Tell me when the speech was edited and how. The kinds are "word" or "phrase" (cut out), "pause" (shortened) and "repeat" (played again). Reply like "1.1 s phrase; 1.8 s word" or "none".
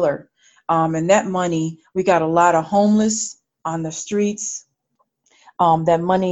3.6 s word